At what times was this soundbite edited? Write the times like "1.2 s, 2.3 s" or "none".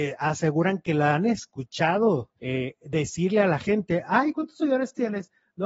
2.4 s